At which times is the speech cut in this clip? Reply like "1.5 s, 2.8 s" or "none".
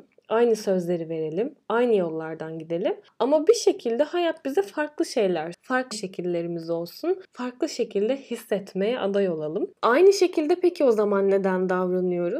5.5 s, 5.9 s, 7.2 s, 9.7 s